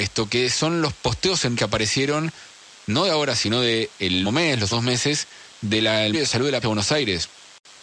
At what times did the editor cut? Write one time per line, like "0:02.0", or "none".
0:01.6
0:04.2
0:04.7
0:06.1
0:06.6